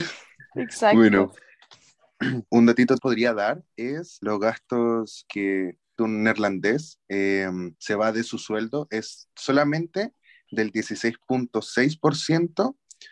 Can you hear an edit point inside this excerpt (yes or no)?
yes